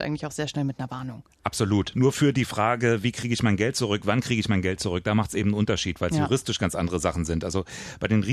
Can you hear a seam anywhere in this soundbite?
no; 0 cuts

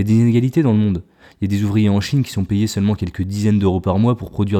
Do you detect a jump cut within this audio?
no; 0 cuts

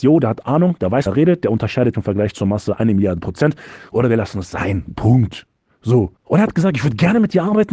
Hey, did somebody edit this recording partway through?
yes; 3 cuts; at 1.1 s, 1.9 s, 6.2 s

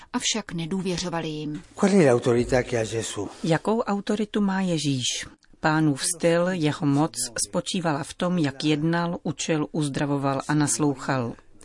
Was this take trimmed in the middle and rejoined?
no; 0 cuts

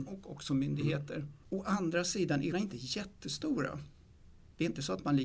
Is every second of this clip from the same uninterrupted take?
no; 1 cut; at 2.5 s

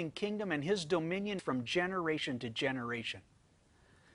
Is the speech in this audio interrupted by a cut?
yes; 1 cut; at 1.4 s

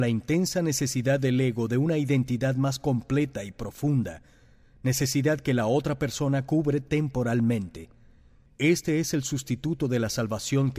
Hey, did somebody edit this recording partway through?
no; 0 cuts

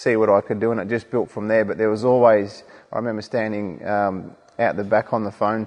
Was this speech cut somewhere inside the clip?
no; 0 cuts

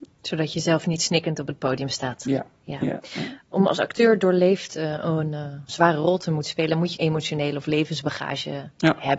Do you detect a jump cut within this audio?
yes; 2 cuts; at 5.7 s, 6.9 s

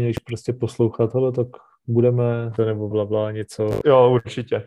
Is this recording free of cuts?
no; 2 cuts; at 2.6 s, 2.9 s

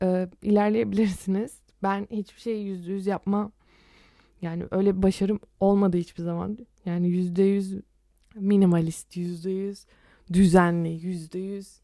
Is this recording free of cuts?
yes; 0 cuts

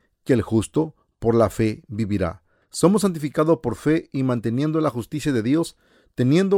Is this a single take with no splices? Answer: yes; 0 cuts

